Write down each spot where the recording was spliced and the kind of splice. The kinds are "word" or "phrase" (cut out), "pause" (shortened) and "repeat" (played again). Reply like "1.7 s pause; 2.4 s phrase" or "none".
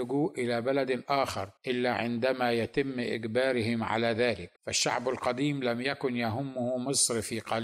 1.6 s pause; 4.6 s pause